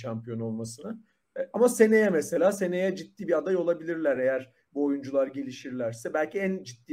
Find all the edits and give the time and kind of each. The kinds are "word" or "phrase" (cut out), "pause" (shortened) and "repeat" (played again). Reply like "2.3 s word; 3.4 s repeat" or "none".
none